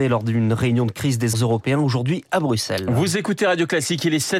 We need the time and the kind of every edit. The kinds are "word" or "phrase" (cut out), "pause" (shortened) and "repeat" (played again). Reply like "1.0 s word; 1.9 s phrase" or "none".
1.3 s word